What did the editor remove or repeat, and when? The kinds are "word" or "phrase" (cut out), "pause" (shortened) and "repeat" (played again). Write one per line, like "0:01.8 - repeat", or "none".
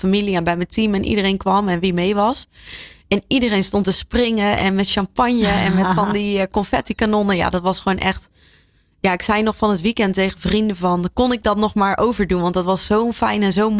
none